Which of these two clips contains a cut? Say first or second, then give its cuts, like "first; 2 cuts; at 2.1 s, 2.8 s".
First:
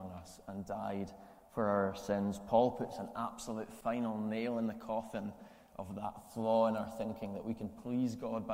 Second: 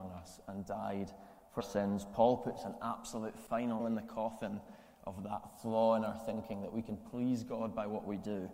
second; 2 cuts; at 1.6 s, 3.8 s